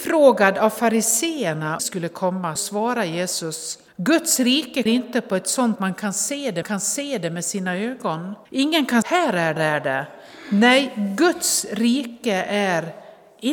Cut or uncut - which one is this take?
cut